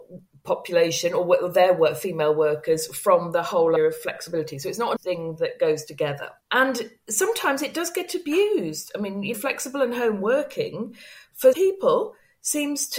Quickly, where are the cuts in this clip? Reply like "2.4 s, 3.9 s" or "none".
3.8 s, 5.0 s, 6.4 s, 9.3 s, 11.5 s

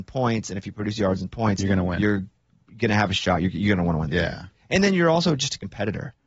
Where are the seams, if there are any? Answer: none

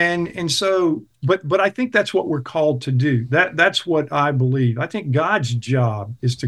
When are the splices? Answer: 1.1 s

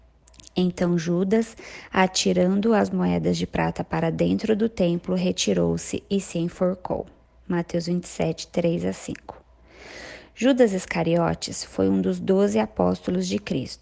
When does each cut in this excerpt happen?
none

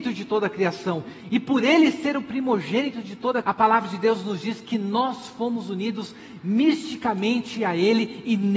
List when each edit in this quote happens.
3.4 s

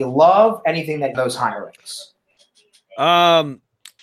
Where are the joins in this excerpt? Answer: 1.1 s

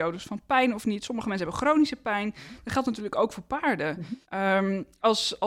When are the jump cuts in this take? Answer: 4.2 s

